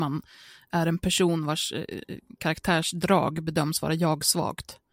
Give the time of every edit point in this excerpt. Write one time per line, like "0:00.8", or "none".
none